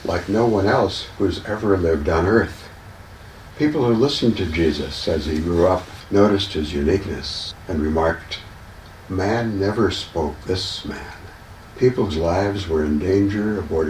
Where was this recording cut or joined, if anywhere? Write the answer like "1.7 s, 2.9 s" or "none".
10.4 s, 12.1 s